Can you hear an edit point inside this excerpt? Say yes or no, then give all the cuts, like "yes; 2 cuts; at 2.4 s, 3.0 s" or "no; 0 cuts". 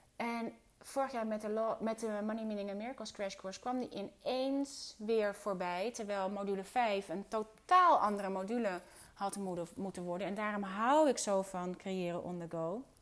no; 0 cuts